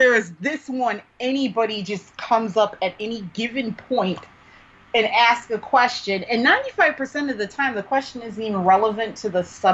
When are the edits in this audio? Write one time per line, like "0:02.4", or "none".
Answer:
none